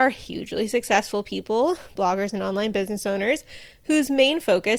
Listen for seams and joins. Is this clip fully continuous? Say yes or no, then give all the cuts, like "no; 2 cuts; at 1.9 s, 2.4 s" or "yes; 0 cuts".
yes; 0 cuts